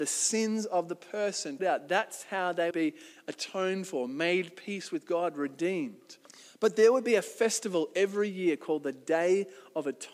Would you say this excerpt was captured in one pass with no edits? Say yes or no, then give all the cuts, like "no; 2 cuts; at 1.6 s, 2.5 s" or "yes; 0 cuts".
no; 3 cuts; at 1.6 s, 2.7 s, 6.3 s